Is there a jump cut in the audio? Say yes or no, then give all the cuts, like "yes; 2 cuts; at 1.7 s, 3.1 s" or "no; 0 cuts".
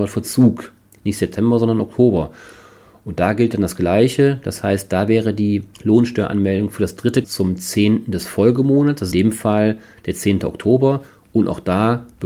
yes; 3 cuts; at 5.7 s, 7.2 s, 9.1 s